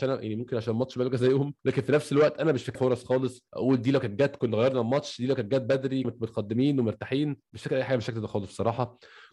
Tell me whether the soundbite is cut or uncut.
cut